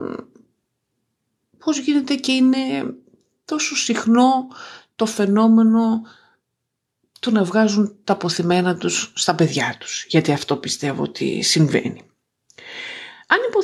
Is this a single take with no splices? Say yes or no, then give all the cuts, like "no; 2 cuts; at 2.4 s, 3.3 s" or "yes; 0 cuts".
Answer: yes; 0 cuts